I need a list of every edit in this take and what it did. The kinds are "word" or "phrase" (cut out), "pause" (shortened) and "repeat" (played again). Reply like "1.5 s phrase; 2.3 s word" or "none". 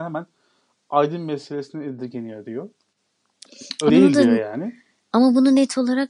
3.9 s word